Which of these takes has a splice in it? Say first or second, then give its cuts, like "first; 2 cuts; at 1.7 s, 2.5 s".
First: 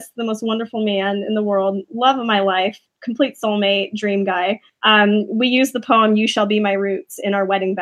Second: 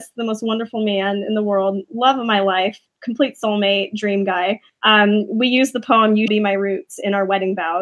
second; 1 cut; at 6.3 s